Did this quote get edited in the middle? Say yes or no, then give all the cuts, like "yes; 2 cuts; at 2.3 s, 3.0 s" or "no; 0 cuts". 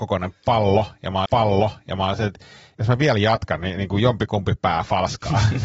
yes; 1 cut; at 1.2 s